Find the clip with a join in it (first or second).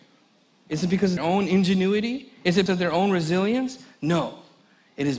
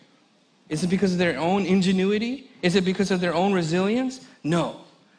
first